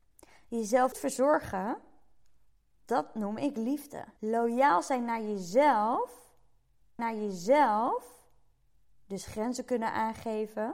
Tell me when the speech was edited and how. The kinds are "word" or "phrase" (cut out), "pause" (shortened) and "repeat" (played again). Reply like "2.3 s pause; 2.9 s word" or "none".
0.9 s word; 4.2 s pause; 7.0 s repeat